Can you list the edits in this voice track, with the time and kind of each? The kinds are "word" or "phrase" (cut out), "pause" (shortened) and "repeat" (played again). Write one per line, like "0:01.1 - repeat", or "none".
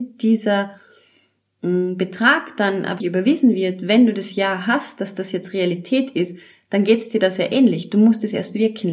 0:03.0 - word